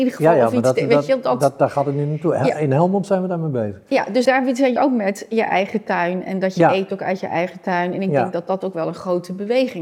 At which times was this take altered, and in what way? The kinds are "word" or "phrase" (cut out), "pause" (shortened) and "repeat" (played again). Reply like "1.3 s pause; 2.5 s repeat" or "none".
4.2 s word; 4.8 s word